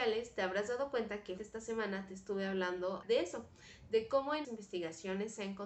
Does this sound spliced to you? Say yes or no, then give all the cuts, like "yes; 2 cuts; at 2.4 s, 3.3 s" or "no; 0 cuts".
yes; 3 cuts; at 1.4 s, 3.0 s, 4.4 s